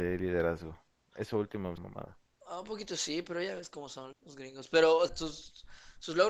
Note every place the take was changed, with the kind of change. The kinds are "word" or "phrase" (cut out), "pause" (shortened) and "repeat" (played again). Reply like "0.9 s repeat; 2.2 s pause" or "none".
1.8 s phrase; 4.1 s word; 5.1 s word